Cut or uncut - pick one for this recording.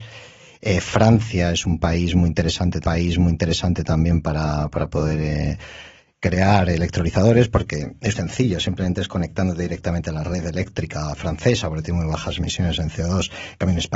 cut